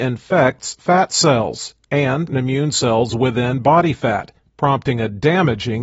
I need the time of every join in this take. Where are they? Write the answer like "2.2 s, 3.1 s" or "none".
2.3 s